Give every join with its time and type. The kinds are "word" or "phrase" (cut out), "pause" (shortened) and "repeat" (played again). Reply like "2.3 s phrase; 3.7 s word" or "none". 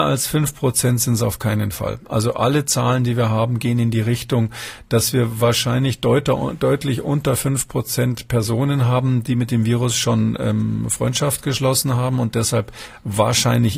none